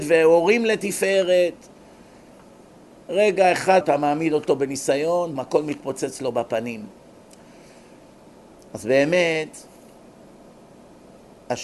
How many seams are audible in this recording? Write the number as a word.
two